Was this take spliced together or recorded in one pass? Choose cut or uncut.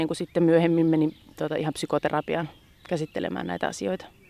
uncut